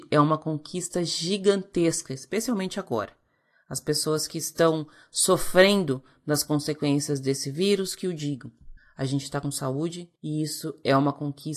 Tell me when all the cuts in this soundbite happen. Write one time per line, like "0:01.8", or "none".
0:10.2